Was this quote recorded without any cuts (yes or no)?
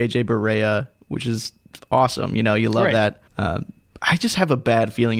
no